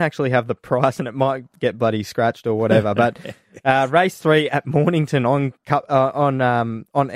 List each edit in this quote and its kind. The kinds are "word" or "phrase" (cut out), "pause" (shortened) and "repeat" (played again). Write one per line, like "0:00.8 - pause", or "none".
none